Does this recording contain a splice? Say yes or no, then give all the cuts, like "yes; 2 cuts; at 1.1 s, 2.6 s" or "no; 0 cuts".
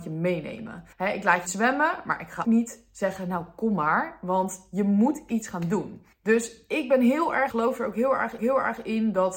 yes; 6 cuts; at 0.9 s, 1.5 s, 2.4 s, 6.1 s, 7.5 s, 8.4 s